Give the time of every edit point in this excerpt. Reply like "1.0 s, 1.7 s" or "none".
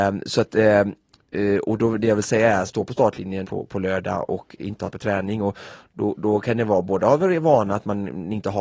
2.7 s, 3.4 s, 4.9 s